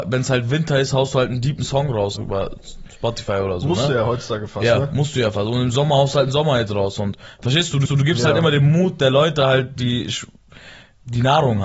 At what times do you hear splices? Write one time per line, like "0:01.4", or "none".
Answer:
0:02.2
0:07.9